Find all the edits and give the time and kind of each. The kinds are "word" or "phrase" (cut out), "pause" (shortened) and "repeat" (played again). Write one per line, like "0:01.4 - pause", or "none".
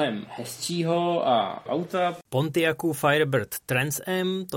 0:01.7 - word

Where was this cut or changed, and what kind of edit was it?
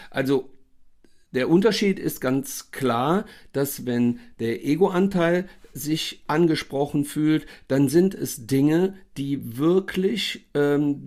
0:05.7 - word

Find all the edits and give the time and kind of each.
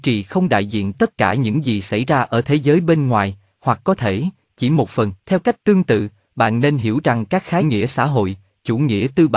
0:00.9 - word
0:05.2 - pause
0:07.6 - phrase

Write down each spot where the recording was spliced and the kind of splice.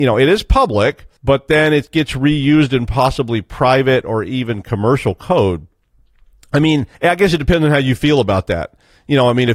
0:01.2 - pause
0:06.9 - pause

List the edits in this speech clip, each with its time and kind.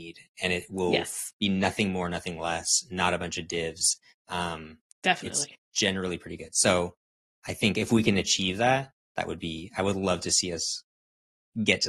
none

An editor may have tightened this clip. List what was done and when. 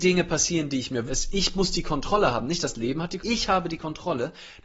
0:01.1 - word
0:03.2 - word

